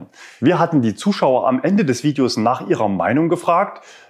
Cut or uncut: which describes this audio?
uncut